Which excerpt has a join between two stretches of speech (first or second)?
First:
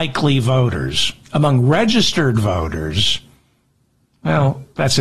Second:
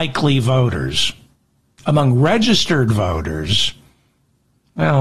first